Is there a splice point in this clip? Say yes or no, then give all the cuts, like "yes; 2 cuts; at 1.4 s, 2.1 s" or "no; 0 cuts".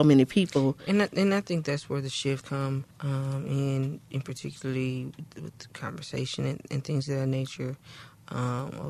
yes; 2 cuts; at 2.4 s, 2.9 s